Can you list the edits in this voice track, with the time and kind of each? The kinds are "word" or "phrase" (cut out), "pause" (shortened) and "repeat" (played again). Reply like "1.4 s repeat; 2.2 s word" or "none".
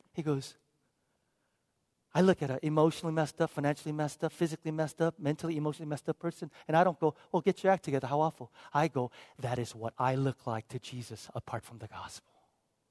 none